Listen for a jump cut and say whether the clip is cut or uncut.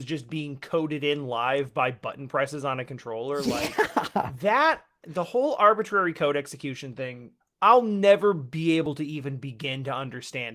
cut